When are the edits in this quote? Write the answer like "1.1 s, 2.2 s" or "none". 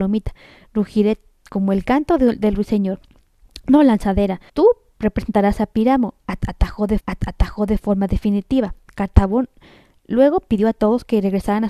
4.5 s, 7.0 s

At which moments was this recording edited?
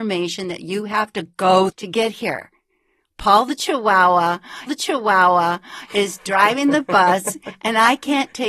1.7 s, 4.7 s

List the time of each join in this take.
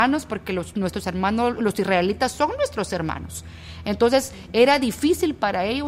1.6 s

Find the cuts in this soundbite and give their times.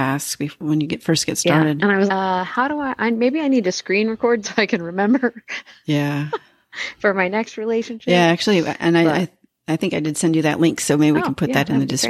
2.1 s, 4.4 s

